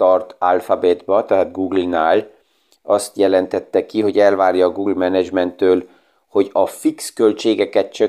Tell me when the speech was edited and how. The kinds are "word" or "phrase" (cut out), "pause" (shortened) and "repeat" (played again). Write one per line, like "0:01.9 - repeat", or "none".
none